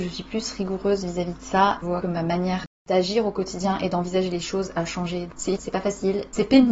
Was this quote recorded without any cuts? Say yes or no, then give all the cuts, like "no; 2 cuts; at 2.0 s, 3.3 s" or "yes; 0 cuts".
no; 2 cuts; at 1.8 s, 5.6 s